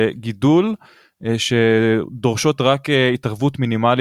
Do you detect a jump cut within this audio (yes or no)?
no